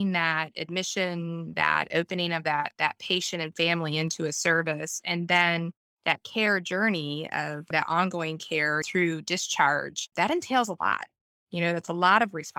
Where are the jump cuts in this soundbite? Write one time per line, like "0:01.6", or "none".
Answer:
none

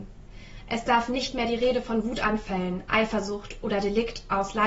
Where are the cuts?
none

